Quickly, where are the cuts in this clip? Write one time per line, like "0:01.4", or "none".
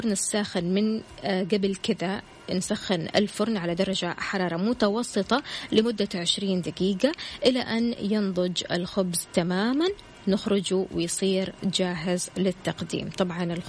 none